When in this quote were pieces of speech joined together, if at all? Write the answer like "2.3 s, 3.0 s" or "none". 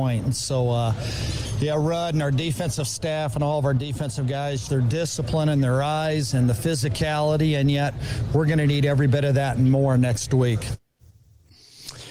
4.7 s